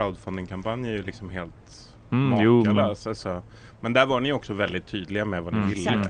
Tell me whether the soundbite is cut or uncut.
uncut